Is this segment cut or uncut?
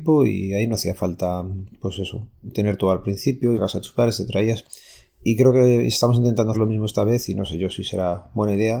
cut